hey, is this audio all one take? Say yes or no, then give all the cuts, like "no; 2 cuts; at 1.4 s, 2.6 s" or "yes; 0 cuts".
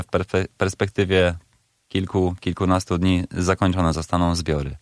yes; 0 cuts